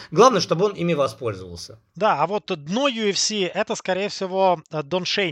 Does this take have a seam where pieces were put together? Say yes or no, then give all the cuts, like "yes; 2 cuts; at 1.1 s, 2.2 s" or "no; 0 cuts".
no; 0 cuts